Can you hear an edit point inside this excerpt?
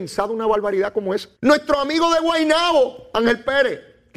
yes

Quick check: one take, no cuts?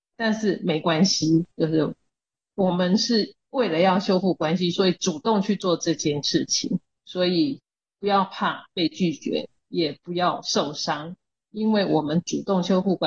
no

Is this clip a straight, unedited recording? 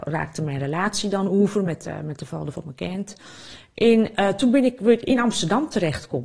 yes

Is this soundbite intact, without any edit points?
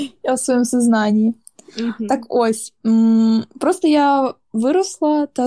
yes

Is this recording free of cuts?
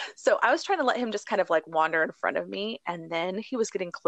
yes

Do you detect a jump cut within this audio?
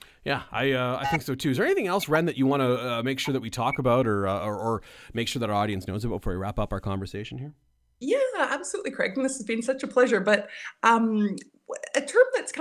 no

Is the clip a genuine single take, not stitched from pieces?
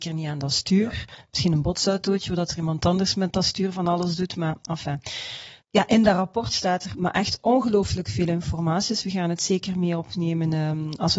no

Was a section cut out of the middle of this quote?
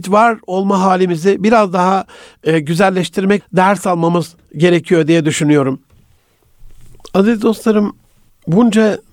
yes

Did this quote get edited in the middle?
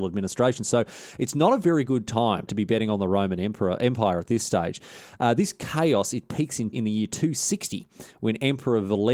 yes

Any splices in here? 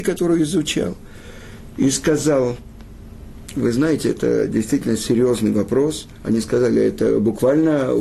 no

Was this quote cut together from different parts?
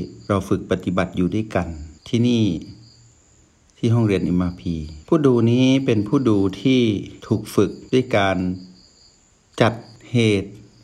yes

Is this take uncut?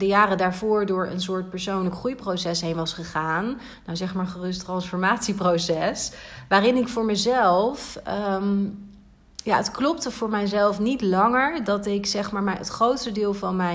yes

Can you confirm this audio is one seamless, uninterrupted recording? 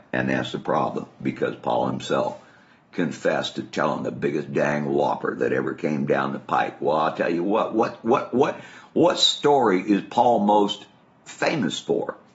yes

